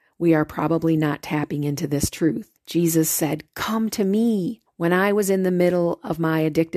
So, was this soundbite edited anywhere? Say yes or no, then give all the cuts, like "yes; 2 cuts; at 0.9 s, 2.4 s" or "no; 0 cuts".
yes; 2 cuts; at 2.6 s, 4.7 s